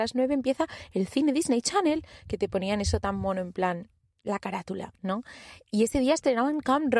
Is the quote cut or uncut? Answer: uncut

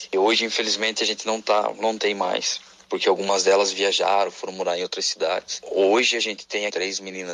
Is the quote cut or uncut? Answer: uncut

